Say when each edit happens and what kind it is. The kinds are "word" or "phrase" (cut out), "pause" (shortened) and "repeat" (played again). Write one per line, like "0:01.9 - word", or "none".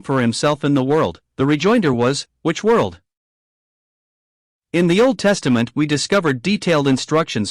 none